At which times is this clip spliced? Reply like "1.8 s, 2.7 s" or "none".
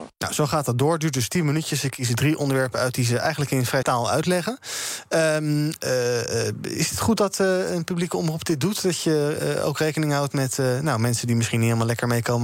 3.8 s